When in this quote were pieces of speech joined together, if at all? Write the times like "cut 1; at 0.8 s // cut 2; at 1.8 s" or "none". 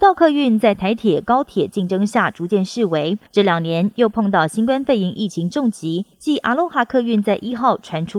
cut 1; at 3.3 s // cut 2; at 6.1 s